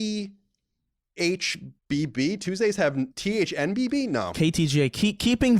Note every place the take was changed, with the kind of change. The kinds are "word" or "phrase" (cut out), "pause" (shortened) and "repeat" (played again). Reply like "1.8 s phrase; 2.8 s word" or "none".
1.8 s pause; 3.1 s pause

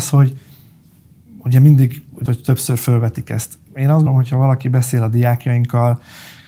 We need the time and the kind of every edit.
2.3 s word; 4.1 s word

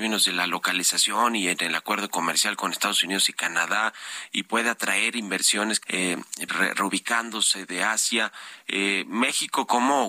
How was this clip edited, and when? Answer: 5.8 s word; 6.5 s word

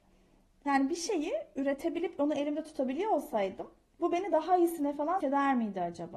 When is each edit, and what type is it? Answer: 5.2 s word

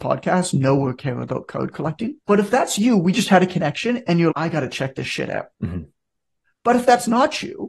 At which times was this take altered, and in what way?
2.2 s pause; 4.3 s word; 5.5 s pause

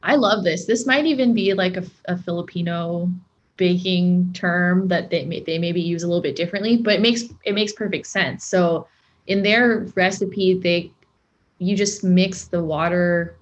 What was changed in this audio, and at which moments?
none

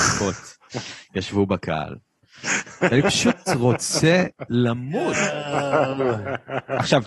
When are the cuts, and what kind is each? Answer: none

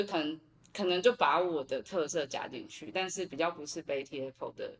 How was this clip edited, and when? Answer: none

